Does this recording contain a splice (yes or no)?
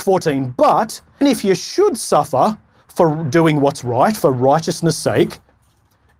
yes